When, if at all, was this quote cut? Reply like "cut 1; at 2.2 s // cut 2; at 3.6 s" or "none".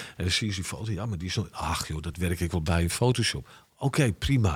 none